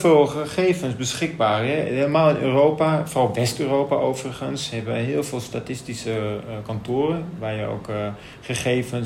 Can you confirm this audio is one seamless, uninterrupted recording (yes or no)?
yes